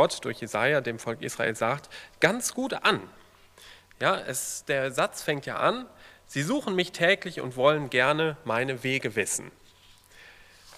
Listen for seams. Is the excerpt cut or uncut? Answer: uncut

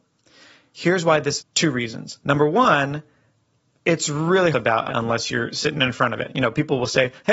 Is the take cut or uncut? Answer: cut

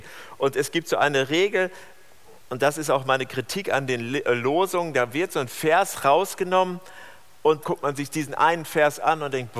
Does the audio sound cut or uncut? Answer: cut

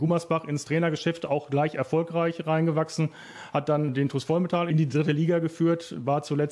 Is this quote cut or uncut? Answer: uncut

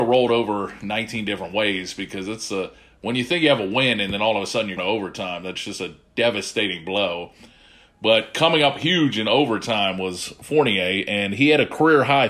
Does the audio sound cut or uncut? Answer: cut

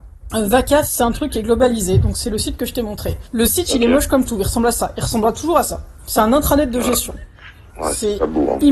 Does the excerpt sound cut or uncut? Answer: uncut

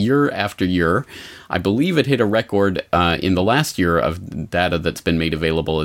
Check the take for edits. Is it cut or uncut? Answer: uncut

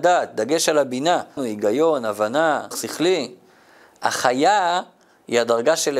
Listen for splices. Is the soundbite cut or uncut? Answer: cut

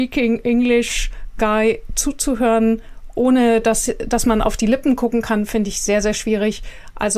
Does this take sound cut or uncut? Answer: uncut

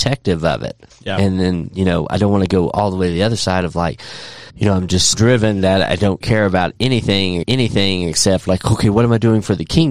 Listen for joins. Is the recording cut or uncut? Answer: cut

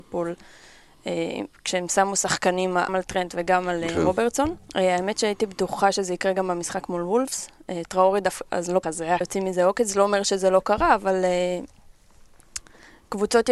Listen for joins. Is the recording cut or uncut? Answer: cut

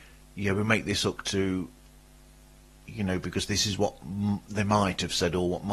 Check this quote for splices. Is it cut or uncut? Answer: uncut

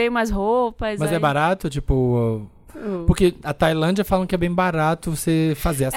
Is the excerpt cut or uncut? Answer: uncut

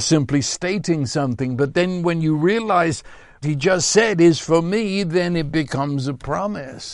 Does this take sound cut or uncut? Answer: cut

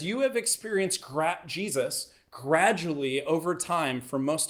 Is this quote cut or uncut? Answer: uncut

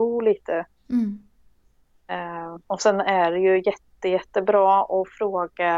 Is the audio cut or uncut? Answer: cut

